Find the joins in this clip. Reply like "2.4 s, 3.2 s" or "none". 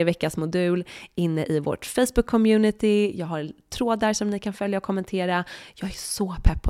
none